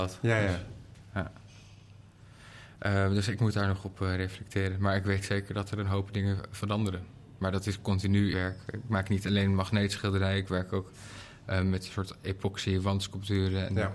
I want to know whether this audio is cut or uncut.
cut